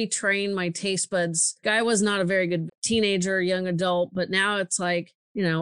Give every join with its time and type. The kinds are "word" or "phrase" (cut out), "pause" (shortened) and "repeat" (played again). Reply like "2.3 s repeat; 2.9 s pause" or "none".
1.6 s word; 2.7 s phrase